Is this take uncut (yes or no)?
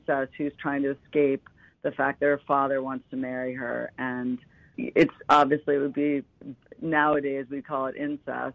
no